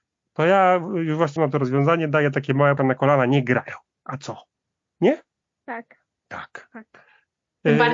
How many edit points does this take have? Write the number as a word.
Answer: three